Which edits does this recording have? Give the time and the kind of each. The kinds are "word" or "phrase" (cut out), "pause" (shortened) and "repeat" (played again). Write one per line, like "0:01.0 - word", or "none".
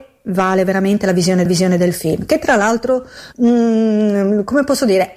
0:01.5 - repeat
0:03.3 - word